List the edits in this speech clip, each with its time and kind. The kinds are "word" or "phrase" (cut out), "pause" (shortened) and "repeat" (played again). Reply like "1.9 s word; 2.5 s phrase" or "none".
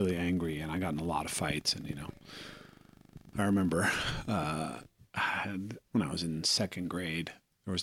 5.0 s pause